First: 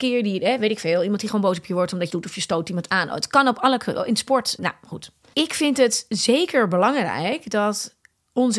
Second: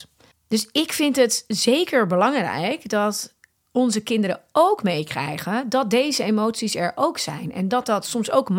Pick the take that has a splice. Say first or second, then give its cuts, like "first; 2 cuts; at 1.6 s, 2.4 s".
first; 3 cuts; at 2.1 s, 4.6 s, 5.3 s